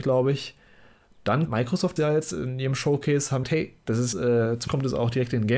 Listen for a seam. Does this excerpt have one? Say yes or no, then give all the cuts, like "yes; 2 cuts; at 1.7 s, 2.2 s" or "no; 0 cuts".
yes; 5 cuts; at 1.5 s, 2.0 s, 3.4 s, 4.1 s, 4.7 s